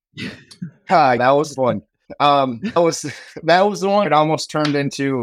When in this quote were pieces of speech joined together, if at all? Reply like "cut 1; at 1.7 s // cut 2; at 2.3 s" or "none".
cut 1; at 1.2 s // cut 2; at 1.6 s // cut 3; at 2.8 s // cut 4; at 4.0 s